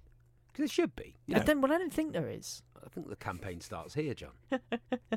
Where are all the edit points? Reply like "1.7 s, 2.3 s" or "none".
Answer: 1.2 s